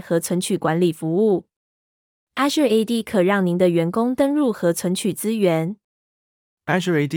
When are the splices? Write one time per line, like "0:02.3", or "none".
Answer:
none